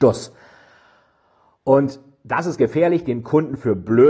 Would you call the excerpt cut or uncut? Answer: uncut